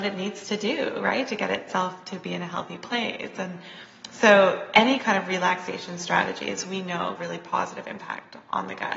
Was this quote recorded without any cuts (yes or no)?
no